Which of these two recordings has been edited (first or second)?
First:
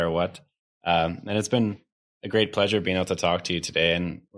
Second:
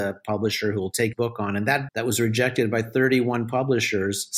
second